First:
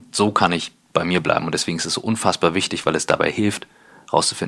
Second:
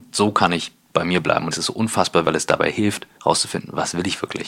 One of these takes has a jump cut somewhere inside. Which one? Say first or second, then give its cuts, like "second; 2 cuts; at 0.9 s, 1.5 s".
second; 3 cuts; at 1.5 s, 2.2 s, 3.1 s